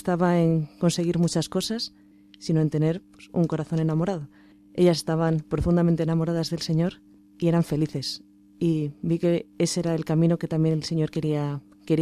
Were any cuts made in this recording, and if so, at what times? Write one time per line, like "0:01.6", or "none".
none